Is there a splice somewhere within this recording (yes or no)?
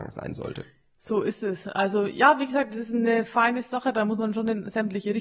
no